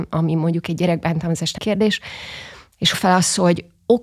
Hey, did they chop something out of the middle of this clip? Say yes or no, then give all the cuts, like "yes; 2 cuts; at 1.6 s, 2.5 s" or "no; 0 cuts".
yes; 2 cuts; at 1.6 s, 2.9 s